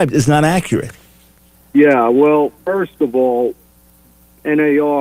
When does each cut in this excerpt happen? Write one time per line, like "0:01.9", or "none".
0:01.4
0:02.6